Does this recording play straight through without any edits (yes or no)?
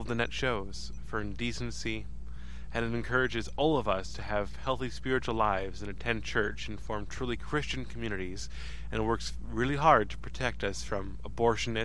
yes